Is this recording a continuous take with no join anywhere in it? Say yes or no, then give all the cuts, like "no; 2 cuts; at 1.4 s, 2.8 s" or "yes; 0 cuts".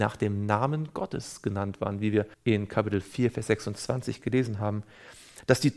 no; 1 cut; at 2.3 s